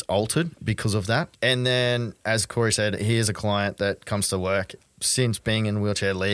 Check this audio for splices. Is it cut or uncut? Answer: cut